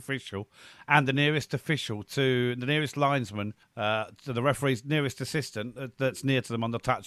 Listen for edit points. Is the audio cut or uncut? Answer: cut